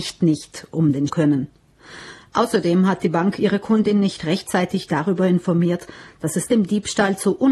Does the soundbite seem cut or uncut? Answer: cut